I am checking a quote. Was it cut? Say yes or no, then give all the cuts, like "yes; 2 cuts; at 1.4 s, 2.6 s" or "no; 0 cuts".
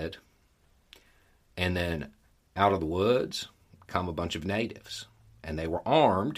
no; 0 cuts